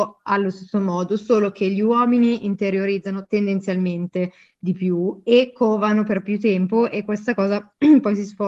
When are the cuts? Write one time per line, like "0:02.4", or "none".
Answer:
none

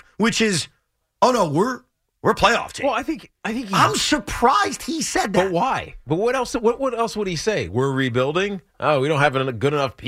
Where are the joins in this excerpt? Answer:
none

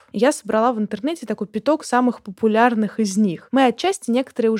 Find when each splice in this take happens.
none

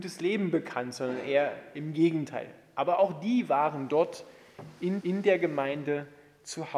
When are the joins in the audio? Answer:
0:05.0

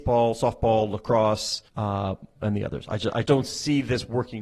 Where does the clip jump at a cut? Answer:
0:01.7
0:03.3

